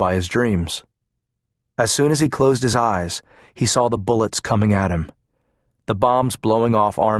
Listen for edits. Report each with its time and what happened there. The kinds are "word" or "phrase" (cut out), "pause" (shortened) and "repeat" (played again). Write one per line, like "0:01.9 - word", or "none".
none